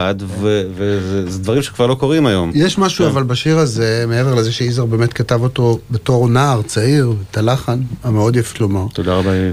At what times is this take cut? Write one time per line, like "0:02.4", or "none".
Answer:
0:08.5